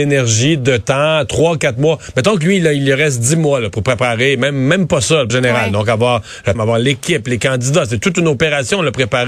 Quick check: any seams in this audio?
yes; 2 cuts; at 5.3 s, 6.5 s

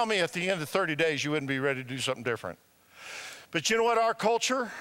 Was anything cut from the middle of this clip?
no; 0 cuts

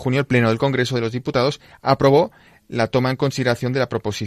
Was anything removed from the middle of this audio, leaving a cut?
no; 0 cuts

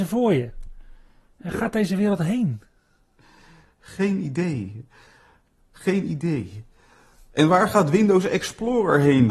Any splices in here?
no; 0 cuts

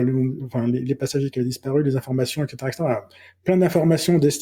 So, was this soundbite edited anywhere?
no; 0 cuts

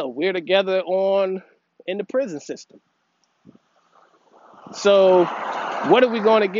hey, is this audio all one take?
yes; 0 cuts

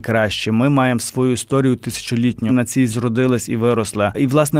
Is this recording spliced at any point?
yes; 2 cuts; at 2.5 s, 2.9 s

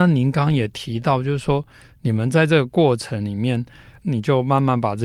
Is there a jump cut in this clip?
no; 0 cuts

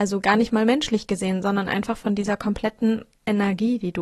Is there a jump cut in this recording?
no; 0 cuts

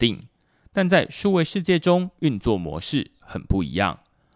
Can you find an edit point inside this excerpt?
no; 0 cuts

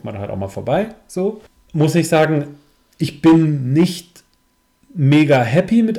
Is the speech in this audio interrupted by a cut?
no; 0 cuts

